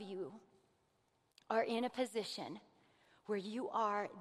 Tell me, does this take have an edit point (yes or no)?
no